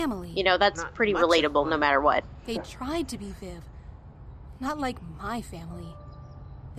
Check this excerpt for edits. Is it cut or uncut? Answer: uncut